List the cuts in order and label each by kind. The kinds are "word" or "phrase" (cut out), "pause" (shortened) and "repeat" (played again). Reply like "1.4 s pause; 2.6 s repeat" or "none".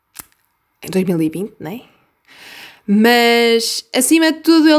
none